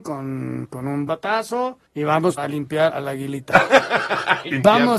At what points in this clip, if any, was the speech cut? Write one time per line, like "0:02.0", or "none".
0:01.1
0:01.9
0:02.4
0:02.9

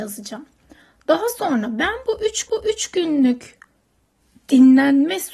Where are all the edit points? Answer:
0:02.5

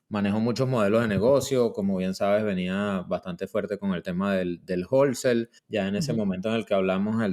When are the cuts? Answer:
0:05.6

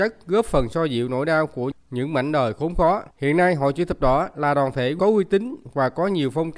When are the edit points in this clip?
0:03.1

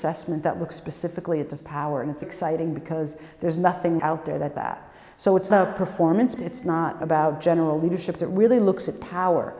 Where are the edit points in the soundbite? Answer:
0:01.5
0:02.2
0:04.0
0:04.5
0:05.5
0:06.4
0:07.0
0:08.2

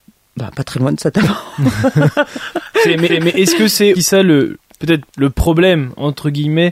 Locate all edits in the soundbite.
0:03.1
0:04.0
0:05.1

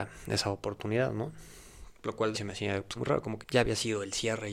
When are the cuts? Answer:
0:02.3
0:03.0
0:03.4

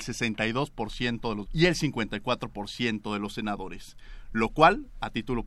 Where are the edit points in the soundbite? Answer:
0:01.5

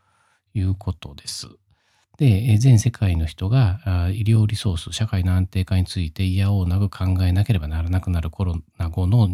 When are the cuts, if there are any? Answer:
none

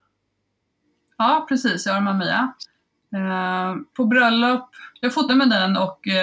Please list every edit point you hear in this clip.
0:03.9
0:05.3

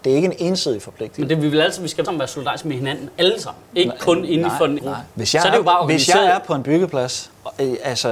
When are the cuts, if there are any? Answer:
0:01.3
0:02.0
0:03.7
0:04.8
0:05.1

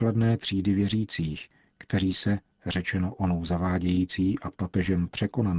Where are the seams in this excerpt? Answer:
none

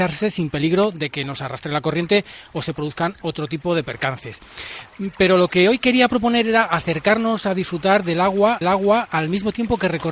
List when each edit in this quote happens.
0:08.6

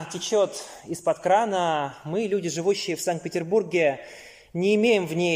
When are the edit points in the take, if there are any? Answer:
none

